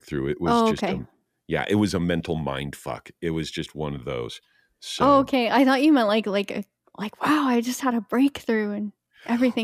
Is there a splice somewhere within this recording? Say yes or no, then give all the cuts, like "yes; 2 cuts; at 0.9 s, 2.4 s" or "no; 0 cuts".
no; 0 cuts